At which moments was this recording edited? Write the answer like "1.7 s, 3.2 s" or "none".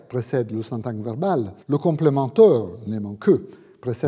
1.6 s, 3.2 s